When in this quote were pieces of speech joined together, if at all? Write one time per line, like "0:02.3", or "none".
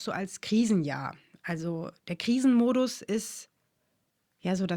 none